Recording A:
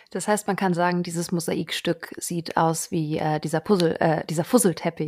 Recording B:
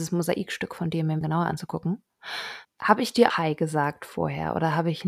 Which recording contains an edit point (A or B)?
B